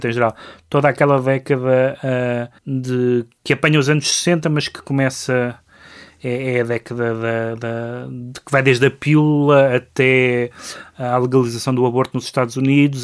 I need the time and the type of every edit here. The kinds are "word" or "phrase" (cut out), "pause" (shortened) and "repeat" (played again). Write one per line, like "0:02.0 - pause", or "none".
0:02.6 - pause